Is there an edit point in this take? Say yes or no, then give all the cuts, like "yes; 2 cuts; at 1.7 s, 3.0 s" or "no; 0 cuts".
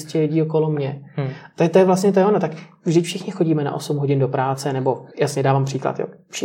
yes; 1 cut; at 5.1 s